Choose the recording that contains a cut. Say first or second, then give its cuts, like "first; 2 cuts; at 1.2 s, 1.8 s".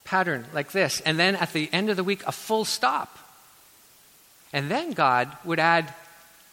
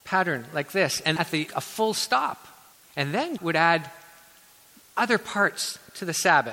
second; 4 cuts; at 1.2 s, 1.5 s, 2.7 s, 3.4 s